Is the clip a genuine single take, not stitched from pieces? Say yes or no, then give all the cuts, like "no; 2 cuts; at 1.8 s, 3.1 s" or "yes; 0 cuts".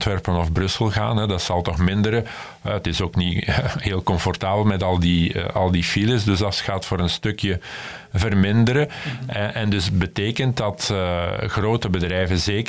yes; 0 cuts